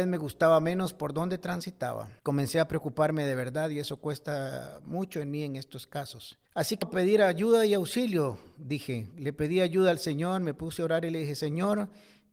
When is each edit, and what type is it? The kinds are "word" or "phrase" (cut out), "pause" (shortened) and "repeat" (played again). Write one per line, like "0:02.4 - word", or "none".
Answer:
0:02.2 - pause
0:06.5 - pause
0:06.8 - word